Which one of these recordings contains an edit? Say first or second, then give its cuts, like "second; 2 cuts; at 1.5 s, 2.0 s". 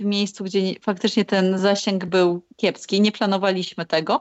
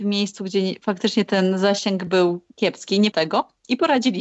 second; 1 cut; at 3.1 s